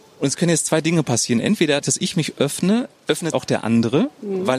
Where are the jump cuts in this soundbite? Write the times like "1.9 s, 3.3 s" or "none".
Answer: 1.8 s, 3.3 s

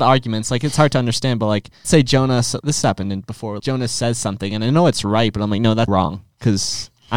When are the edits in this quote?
1.8 s, 2.6 s, 3.6 s, 5.9 s

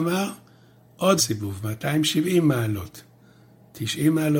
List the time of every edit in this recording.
1.2 s

